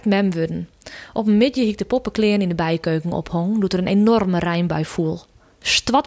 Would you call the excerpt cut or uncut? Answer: uncut